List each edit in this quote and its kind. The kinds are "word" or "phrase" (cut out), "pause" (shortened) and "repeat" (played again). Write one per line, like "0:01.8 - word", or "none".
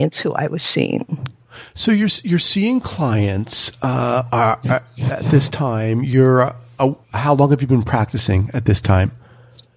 0:07.0 - pause